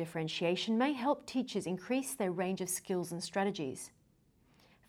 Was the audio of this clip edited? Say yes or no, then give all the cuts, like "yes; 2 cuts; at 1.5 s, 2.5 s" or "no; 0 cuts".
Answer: no; 0 cuts